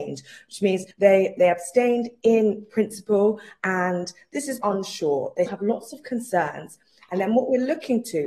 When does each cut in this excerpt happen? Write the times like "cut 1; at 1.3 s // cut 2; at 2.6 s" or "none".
cut 1; at 0.9 s // cut 2; at 4.6 s // cut 3; at 5.5 s